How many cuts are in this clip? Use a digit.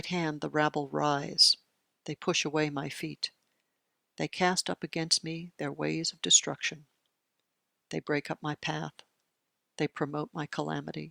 0